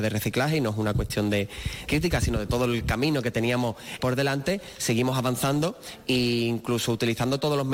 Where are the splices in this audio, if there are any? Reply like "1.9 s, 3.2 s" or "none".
1.9 s, 4.0 s